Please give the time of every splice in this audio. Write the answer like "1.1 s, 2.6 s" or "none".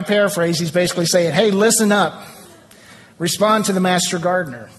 none